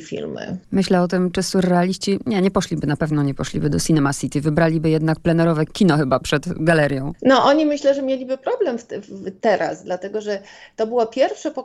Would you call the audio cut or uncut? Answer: uncut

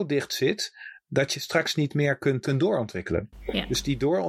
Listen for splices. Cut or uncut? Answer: cut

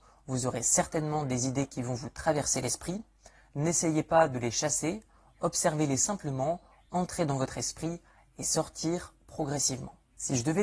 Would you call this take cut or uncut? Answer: uncut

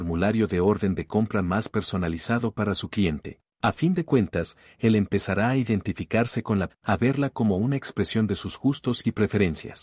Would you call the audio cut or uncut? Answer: cut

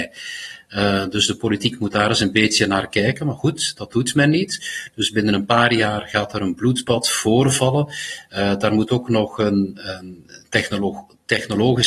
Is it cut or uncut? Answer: uncut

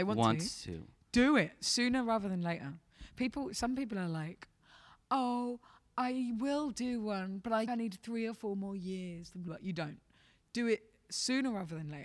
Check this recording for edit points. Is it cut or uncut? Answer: cut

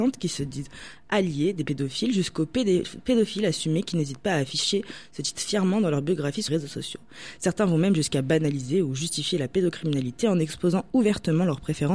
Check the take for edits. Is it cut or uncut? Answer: cut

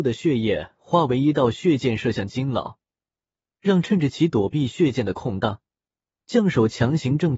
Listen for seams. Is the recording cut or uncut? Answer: uncut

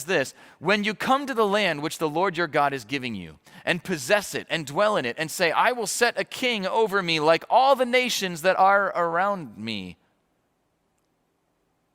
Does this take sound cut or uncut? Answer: uncut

